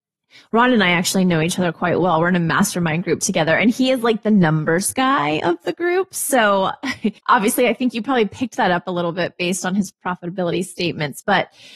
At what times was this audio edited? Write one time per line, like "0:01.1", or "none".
0:07.2